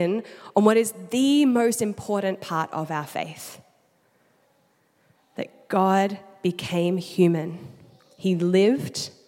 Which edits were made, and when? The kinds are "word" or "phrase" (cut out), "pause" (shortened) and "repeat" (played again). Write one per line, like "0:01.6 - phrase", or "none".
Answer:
none